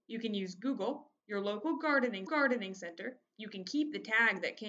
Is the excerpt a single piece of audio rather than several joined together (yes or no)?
no